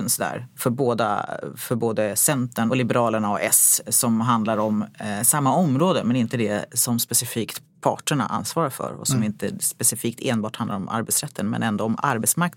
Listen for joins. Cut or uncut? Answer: uncut